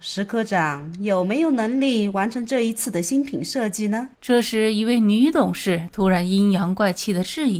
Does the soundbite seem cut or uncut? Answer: cut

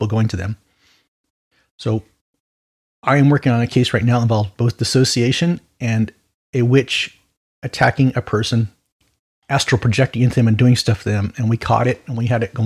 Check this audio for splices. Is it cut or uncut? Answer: uncut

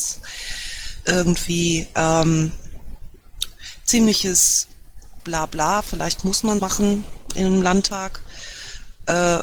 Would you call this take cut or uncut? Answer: cut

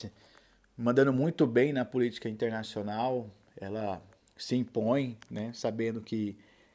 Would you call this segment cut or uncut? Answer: uncut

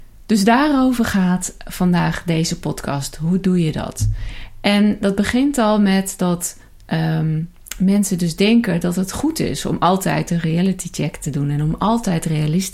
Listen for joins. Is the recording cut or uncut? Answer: uncut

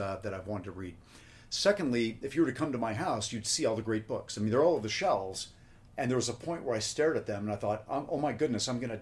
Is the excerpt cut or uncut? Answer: cut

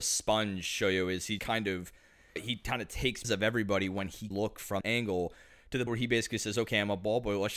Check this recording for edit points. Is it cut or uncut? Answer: cut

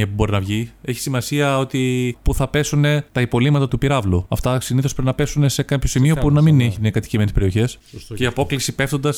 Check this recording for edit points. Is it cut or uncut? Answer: cut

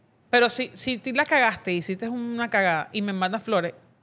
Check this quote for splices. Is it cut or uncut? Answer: uncut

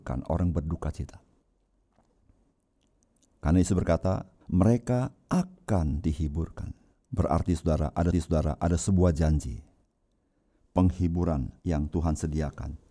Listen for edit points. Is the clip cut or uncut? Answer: cut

